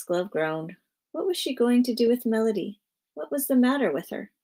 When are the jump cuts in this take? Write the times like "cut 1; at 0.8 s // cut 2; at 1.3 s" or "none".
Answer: none